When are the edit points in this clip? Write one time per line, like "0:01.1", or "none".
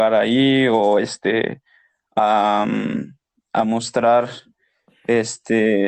none